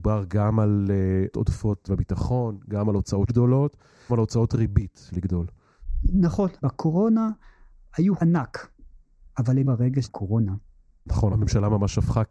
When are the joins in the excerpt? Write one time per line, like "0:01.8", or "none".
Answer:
0:01.3
0:01.9
0:03.3
0:04.1
0:05.1
0:06.6
0:08.2
0:09.6
0:10.0